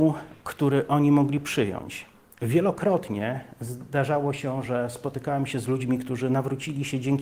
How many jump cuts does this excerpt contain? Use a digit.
0